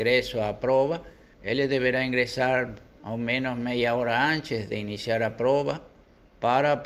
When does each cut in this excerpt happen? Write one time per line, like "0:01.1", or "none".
none